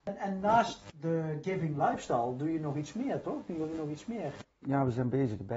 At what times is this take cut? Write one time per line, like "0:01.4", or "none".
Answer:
none